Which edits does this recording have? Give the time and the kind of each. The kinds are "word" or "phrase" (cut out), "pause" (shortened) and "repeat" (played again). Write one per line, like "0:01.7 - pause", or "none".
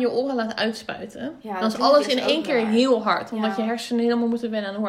none